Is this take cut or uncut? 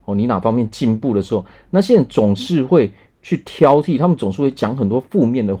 uncut